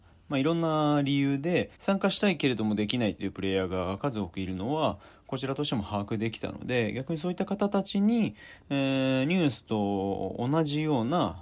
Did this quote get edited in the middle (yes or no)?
yes